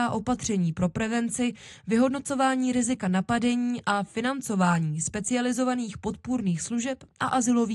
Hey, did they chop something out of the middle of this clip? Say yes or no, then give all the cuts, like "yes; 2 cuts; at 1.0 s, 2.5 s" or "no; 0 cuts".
no; 0 cuts